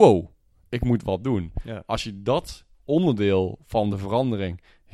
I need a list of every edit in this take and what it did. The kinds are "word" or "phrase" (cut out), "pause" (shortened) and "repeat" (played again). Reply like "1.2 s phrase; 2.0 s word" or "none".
none